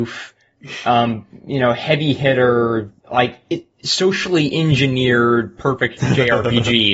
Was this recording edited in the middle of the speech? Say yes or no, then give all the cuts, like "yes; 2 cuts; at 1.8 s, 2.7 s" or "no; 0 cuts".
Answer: yes; 1 cut; at 3.0 s